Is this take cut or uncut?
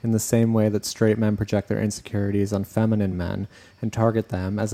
uncut